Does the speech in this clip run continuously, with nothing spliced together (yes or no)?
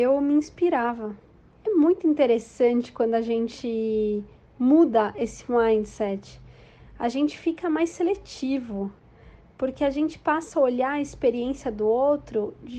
yes